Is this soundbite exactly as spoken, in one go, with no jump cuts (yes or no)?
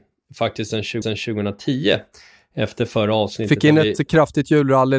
no